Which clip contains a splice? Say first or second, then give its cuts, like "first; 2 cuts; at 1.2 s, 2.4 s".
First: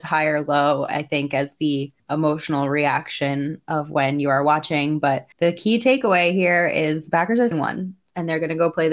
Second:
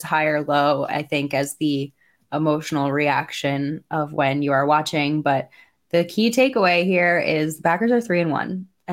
first; 3 cuts; at 2.0 s, 5.3 s, 7.5 s